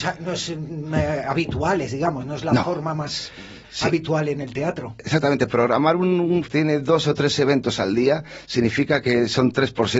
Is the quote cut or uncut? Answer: cut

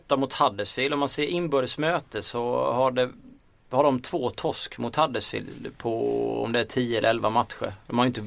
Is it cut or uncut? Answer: uncut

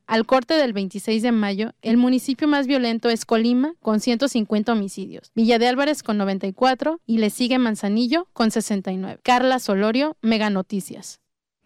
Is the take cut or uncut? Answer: uncut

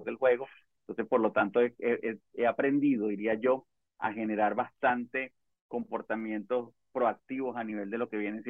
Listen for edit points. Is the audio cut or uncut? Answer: uncut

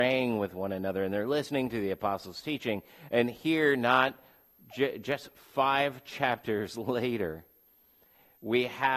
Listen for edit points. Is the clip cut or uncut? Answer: uncut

